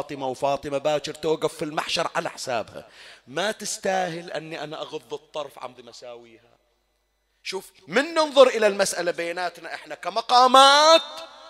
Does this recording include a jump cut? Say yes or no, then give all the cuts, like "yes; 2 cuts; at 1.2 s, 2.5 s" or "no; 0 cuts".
yes; 1 cut; at 5.8 s